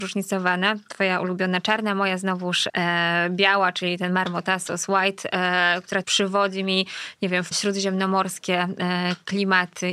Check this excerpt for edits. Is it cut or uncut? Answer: cut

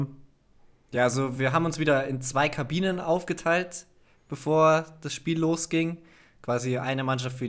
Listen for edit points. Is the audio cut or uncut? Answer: uncut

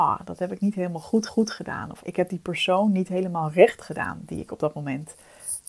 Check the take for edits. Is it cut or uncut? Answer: cut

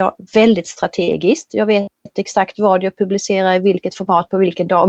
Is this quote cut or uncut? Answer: uncut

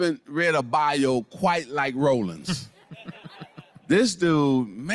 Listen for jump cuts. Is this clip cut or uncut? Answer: uncut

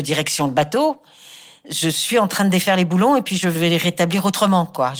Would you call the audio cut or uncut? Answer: uncut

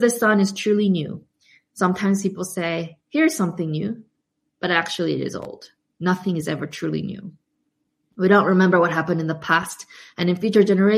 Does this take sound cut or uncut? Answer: uncut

